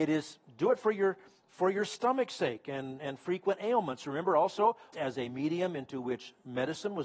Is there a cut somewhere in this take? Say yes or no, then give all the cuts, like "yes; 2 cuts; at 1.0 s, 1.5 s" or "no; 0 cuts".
yes; 1 cut; at 4.9 s